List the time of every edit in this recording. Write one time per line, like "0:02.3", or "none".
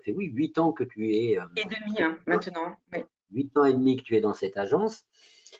none